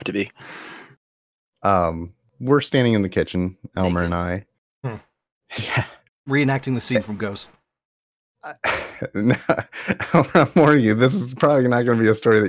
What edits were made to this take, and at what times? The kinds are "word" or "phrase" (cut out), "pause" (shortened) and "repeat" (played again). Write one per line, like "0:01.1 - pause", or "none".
none